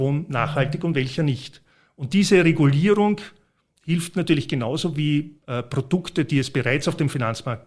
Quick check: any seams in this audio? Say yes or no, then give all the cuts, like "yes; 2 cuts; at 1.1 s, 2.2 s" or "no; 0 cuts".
no; 0 cuts